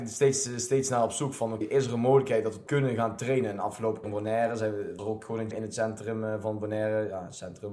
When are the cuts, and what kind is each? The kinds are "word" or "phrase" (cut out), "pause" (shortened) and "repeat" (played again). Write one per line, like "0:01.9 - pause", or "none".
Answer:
0:01.6 - word
0:02.7 - word
0:04.0 - word
0:05.0 - word
0:05.5 - word